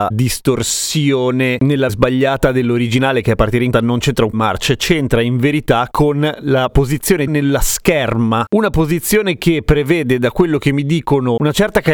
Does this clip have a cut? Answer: yes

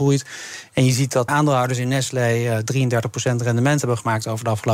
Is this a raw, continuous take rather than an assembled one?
no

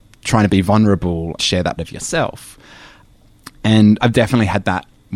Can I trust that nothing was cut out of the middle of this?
no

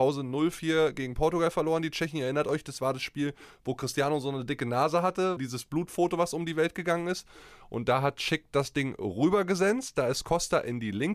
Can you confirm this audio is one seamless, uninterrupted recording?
yes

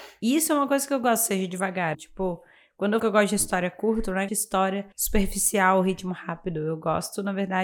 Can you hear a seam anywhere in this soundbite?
yes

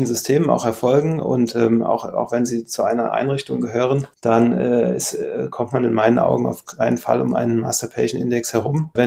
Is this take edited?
no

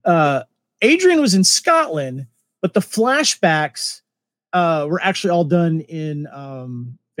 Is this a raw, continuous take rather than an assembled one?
yes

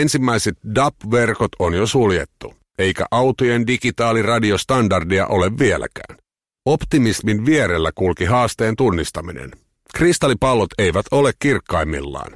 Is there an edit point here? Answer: no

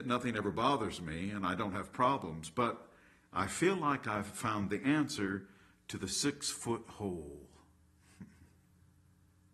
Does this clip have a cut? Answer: no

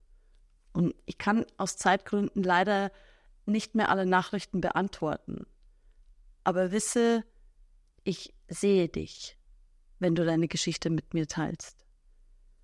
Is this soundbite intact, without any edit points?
yes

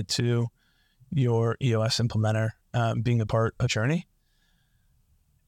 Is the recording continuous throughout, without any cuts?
no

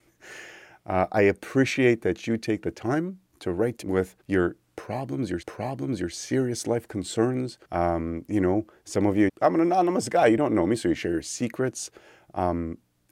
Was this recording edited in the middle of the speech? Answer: yes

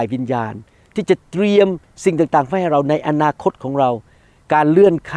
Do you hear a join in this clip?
no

